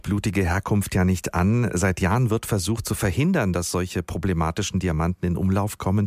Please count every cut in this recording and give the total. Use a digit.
0